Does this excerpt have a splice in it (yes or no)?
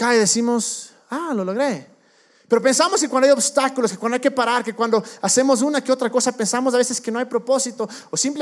no